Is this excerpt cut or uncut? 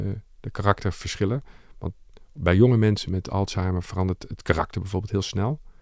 uncut